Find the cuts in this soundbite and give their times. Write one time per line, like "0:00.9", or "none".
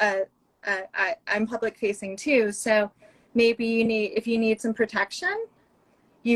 none